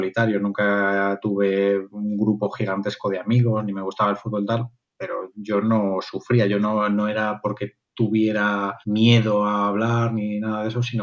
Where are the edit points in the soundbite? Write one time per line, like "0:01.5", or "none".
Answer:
0:08.8

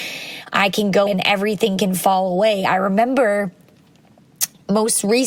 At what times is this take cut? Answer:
0:01.1

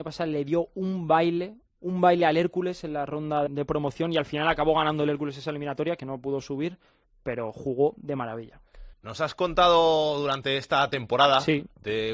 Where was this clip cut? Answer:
0:03.5
0:08.9

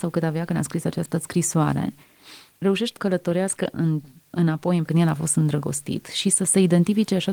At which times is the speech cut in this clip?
0:03.0
0:04.3
0:04.8

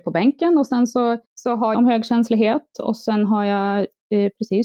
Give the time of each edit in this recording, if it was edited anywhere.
0:01.2
0:01.7

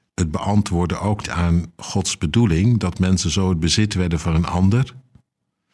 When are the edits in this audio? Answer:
0:01.2

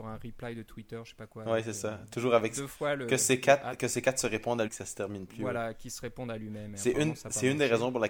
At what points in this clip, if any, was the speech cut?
0:04.7

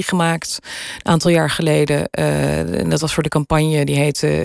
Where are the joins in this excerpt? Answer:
none

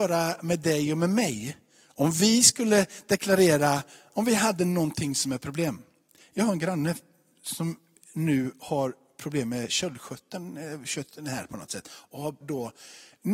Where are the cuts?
0:12.4

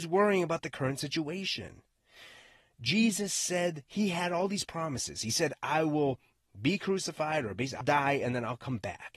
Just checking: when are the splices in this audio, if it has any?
0:07.8

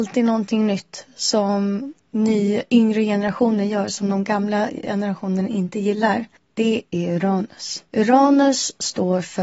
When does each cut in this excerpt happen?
0:02.0
0:06.4
0:07.9

